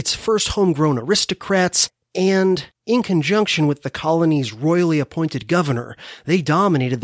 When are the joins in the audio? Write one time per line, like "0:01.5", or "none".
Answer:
0:02.7

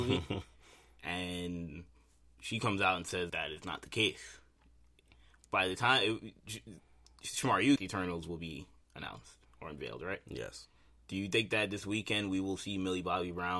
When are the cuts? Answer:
0:03.3
0:07.8

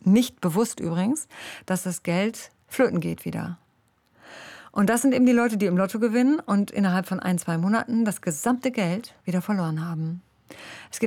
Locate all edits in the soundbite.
0:02.6
0:09.2

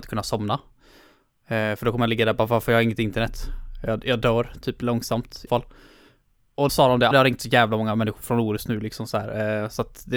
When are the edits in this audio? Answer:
0:05.5
0:06.7
0:07.1

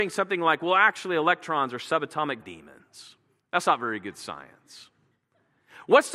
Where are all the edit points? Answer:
0:02.4

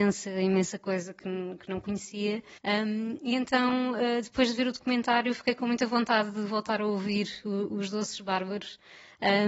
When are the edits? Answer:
0:02.6

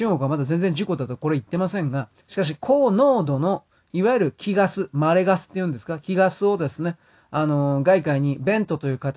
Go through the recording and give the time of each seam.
0:02.2

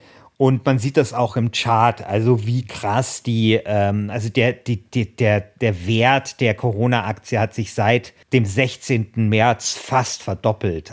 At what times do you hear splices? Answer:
0:08.2

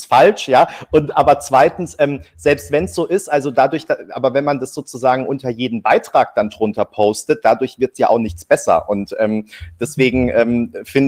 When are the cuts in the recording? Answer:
none

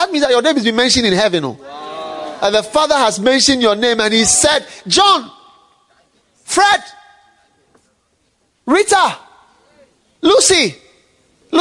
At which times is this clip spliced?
none

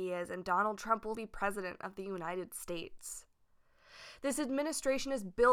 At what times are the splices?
0:01.1

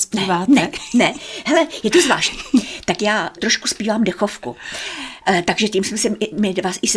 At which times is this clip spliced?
0:03.4

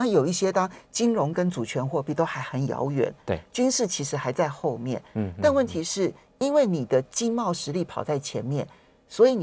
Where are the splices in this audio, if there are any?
none

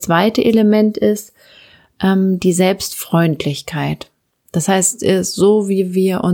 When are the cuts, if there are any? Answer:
none

